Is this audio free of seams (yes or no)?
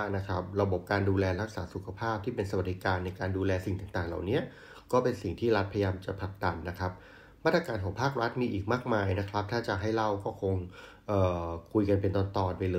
yes